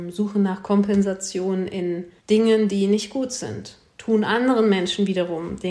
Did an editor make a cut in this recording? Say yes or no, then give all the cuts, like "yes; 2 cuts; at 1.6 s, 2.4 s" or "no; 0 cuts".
yes; 1 cut; at 2.2 s